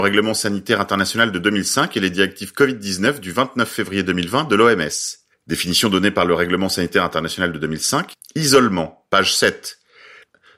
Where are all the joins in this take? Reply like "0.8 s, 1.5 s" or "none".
none